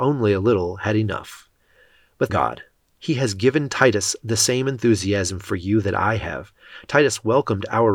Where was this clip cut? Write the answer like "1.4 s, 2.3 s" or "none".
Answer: 2.3 s